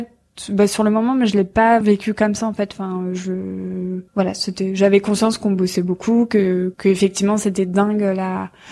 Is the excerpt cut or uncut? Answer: cut